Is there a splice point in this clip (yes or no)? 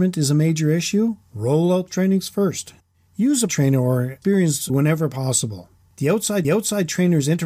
yes